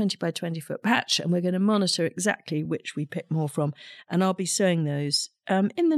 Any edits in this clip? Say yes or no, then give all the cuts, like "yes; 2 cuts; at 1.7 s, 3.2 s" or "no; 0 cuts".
no; 0 cuts